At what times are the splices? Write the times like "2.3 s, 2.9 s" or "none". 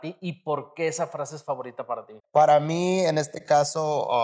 2.2 s